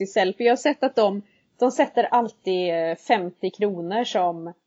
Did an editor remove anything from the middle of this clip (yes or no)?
no